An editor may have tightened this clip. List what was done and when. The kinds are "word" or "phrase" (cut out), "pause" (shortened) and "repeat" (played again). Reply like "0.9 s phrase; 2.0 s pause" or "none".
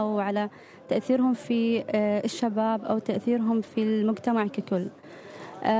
none